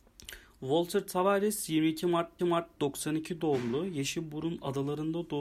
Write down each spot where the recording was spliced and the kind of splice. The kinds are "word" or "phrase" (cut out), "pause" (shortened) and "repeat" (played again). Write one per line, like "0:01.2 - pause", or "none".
0:02.4 - repeat